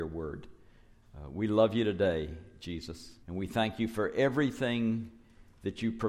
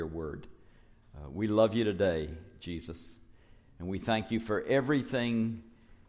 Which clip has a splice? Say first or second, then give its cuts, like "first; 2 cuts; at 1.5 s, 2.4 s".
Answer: first; 1 cut; at 3.2 s